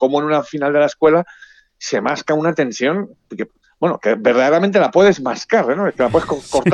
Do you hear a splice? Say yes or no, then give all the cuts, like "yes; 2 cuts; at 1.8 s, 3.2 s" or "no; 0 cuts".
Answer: no; 0 cuts